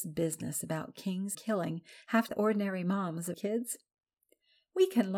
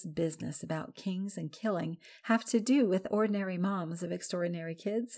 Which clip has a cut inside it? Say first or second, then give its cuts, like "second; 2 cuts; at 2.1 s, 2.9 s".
first; 3 cuts; at 1.3 s, 2.3 s, 3.3 s